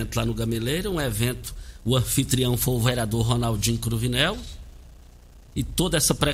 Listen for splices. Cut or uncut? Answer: uncut